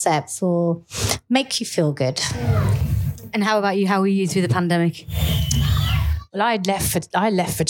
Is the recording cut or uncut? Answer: uncut